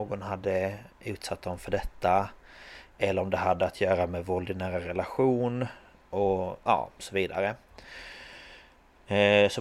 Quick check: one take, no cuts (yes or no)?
yes